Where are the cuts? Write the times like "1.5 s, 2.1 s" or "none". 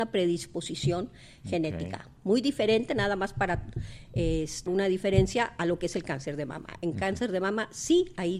4.7 s